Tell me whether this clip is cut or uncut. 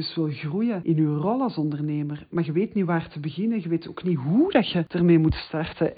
uncut